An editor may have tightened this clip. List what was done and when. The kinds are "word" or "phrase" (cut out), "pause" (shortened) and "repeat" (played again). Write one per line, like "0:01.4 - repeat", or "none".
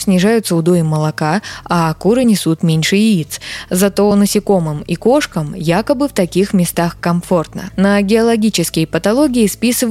none